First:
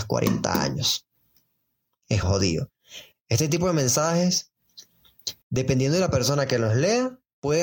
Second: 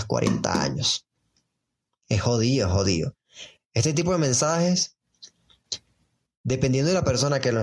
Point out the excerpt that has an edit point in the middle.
first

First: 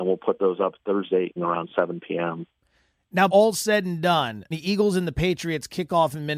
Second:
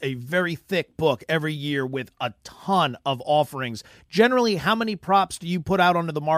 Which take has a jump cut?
first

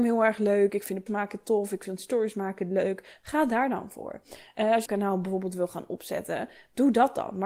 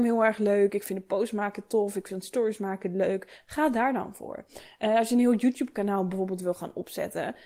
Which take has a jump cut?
first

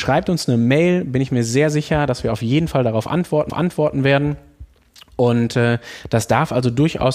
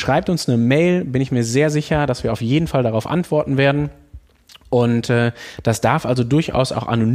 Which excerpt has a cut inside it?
first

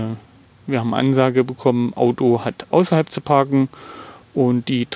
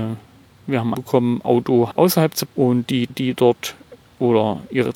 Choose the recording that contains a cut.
second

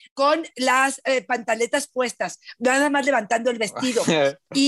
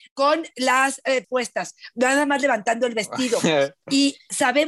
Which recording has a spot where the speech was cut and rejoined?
second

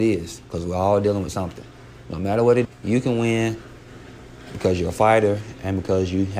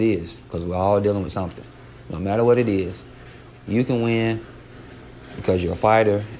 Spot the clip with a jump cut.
first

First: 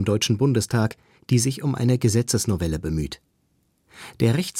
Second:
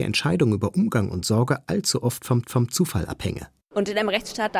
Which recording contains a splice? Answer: second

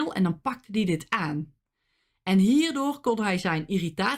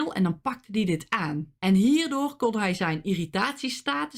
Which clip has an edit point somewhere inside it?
second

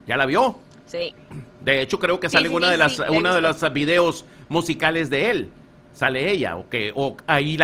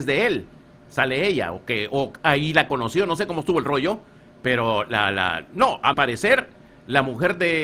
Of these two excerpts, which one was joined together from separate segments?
second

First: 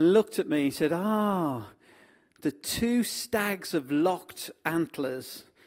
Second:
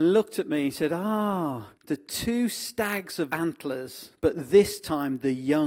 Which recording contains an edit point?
second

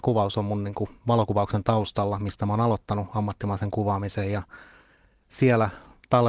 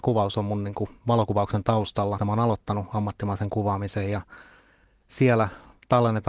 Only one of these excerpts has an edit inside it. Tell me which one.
second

